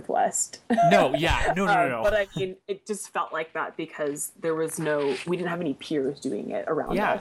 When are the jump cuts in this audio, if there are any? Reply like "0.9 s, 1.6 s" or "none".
none